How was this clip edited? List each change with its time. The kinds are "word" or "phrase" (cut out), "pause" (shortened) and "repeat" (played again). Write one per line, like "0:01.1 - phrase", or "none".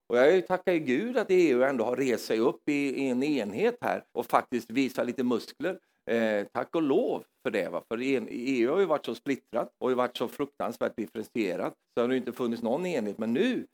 0:04.1 - pause
0:09.7 - pause
0:11.8 - pause